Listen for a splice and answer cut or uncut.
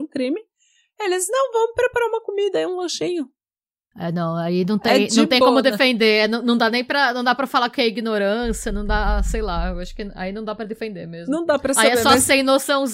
uncut